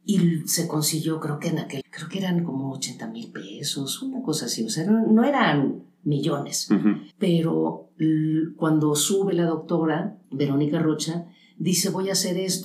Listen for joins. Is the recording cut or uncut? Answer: cut